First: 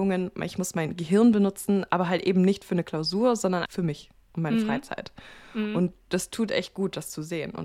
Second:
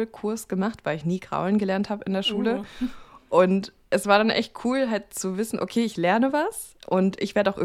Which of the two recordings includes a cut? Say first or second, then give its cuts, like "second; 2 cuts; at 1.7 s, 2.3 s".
first; 1 cut; at 3.7 s